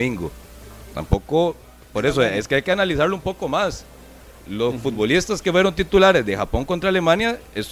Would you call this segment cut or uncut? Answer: uncut